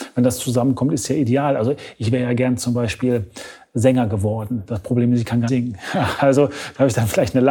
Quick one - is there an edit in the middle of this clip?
yes; 1 cut; at 5.5 s

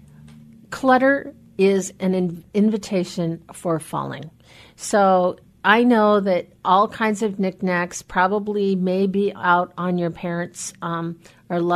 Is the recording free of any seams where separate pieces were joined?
yes; 0 cuts

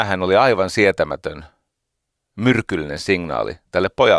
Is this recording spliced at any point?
no; 0 cuts

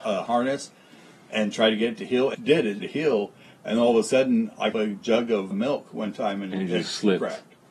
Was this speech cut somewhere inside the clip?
yes; 4 cuts; at 2.3 s, 2.8 s, 4.7 s, 5.5 s

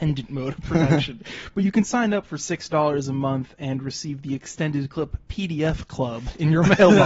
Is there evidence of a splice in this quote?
no; 0 cuts

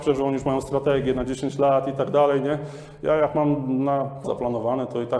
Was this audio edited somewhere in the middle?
yes; 1 cut; at 4.2 s

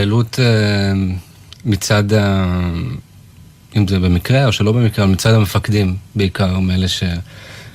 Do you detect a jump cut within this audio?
yes; 1 cut; at 6.1 s

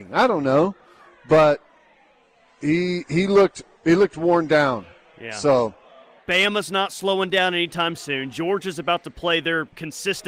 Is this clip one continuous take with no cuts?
yes; 0 cuts

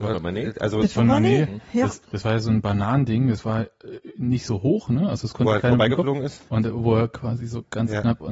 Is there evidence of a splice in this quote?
yes; 2 cuts; at 2.0 s, 6.5 s

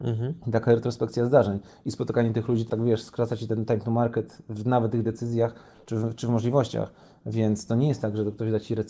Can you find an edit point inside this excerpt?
yes; 1 cut; at 2.7 s

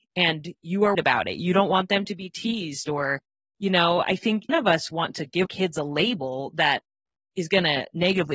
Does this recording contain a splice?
yes; 3 cuts; at 0.9 s, 4.5 s, 5.5 s

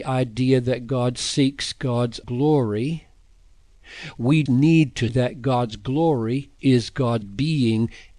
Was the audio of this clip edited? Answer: yes; 5 cuts; at 2.2 s, 4.5 s, 5.1 s, 6.6 s, 7.2 s

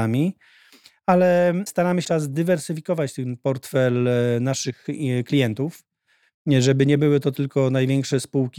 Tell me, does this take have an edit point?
yes; 1 cut; at 2.0 s

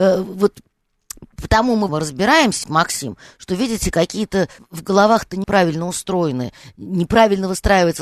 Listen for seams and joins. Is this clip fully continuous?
no; 5 cuts; at 1.3 s, 1.9 s, 2.6 s, 4.6 s, 5.4 s

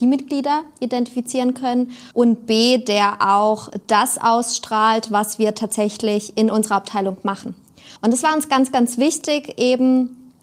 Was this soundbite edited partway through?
yes; 2 cuts; at 2.1 s, 8.0 s

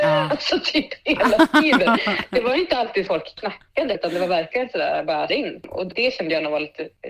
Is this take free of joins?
no; 3 cuts; at 3.1 s, 3.9 s, 5.3 s

